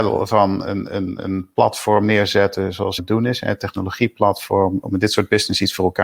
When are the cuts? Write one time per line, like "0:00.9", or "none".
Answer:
0:03.0
0:04.8